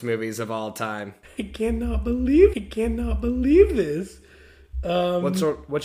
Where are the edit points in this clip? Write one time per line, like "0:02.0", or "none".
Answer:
0:02.5